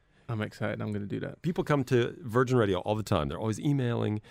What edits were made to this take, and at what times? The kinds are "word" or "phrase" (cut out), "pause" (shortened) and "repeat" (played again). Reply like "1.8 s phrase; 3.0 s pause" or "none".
none